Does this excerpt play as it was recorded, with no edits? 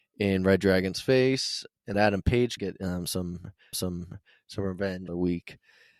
no; 4 cuts; at 1.9 s, 2.6 s, 3.7 s, 5.1 s

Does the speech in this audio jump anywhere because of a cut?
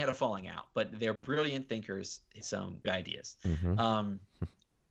yes; 3 cuts; at 1.2 s, 2.4 s, 2.8 s

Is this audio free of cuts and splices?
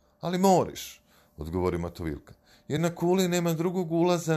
yes; 0 cuts

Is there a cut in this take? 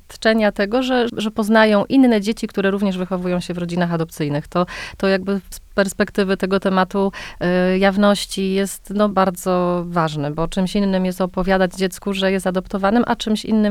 yes; 2 cuts; at 1.1 s, 9.1 s

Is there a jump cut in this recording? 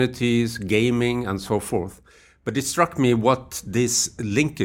no; 0 cuts

